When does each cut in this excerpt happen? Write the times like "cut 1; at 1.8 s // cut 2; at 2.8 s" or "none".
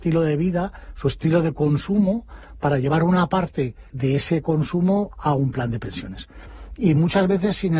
cut 1; at 3.9 s

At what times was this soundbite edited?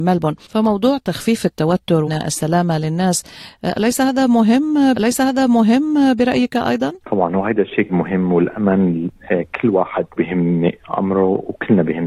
cut 1; at 2.1 s // cut 2; at 4.9 s // cut 3; at 7.0 s // cut 4; at 7.9 s // cut 5; at 10.2 s

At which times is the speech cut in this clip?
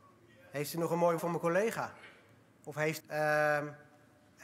cut 1; at 1.2 s // cut 2; at 3.0 s

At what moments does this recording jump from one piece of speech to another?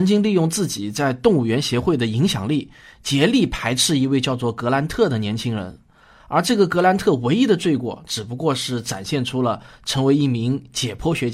none

